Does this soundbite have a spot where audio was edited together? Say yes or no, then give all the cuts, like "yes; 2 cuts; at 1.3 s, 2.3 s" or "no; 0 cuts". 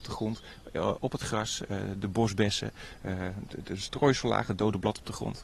no; 0 cuts